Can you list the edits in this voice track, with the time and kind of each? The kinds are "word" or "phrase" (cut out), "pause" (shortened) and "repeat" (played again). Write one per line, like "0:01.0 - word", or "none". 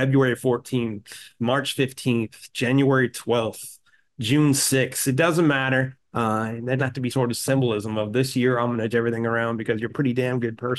0:06.8 - word
0:07.1 - word
0:08.9 - word
0:09.9 - word